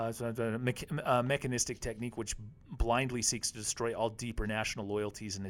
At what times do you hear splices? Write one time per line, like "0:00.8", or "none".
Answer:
none